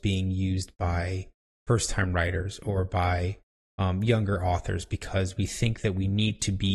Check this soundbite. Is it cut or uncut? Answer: uncut